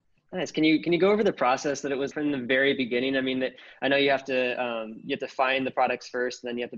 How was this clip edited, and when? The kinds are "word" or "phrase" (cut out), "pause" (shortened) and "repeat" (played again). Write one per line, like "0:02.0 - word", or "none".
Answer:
0:02.1 - word